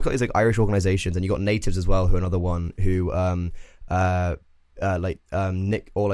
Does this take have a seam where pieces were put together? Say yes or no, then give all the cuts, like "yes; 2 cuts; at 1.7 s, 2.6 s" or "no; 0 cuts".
no; 0 cuts